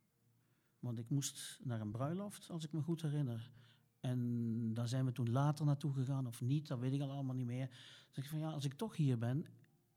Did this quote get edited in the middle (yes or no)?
no